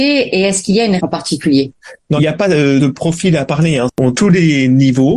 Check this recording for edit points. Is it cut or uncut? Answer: cut